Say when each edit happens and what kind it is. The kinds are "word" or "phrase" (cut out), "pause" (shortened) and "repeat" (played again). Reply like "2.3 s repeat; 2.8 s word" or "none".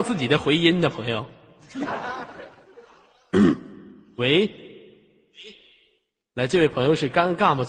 none